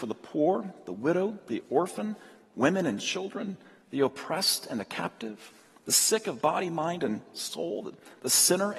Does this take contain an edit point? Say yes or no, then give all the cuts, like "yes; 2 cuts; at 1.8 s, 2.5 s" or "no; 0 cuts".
no; 0 cuts